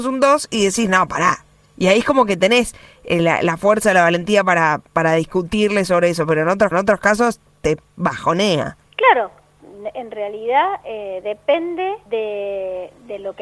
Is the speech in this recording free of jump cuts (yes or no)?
no